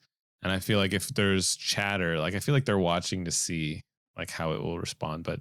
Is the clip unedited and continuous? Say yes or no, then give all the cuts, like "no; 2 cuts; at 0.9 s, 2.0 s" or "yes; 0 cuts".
yes; 0 cuts